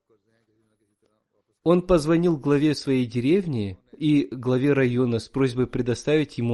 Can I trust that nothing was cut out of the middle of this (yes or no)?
yes